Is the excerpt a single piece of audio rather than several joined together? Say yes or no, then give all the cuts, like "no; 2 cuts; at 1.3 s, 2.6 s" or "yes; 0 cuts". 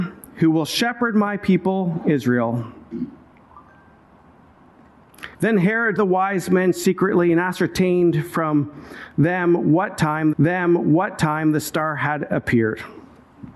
no; 3 cuts; at 5.3 s, 6.0 s, 10.3 s